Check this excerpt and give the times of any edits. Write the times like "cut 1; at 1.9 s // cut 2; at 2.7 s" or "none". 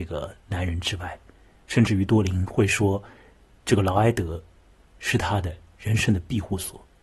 none